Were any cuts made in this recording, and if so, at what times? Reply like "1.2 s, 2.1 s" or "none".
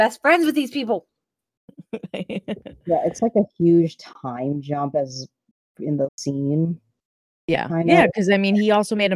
6.1 s